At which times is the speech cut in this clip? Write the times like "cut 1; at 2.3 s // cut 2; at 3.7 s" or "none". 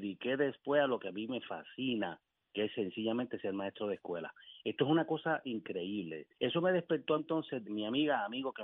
cut 1; at 2.3 s // cut 2; at 6.3 s // cut 3; at 7.2 s // cut 4; at 7.6 s